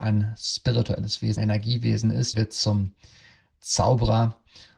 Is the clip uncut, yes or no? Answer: no